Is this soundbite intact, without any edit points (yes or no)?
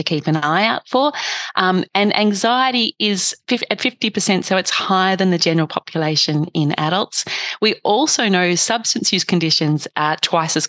yes